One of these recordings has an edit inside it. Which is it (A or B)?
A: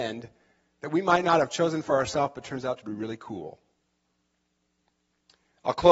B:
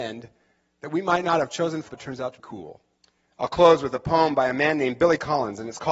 B